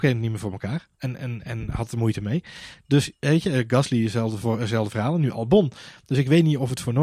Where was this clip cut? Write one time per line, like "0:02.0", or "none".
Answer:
0:00.9